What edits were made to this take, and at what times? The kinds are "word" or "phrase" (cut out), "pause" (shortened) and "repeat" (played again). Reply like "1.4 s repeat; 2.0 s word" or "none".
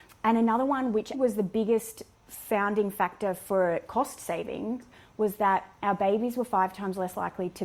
1.1 s word

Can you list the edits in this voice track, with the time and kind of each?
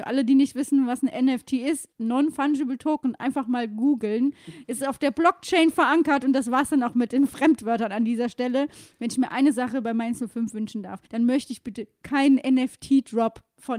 1.9 s pause; 11.1 s pause

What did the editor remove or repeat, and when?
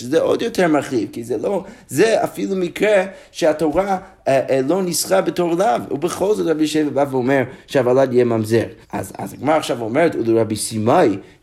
8.8 s pause

